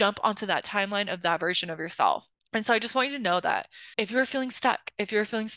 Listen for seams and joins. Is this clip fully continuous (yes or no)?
no